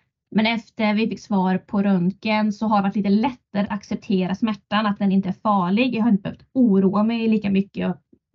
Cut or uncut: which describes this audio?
cut